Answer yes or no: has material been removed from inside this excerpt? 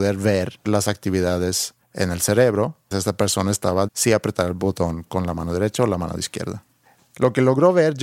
yes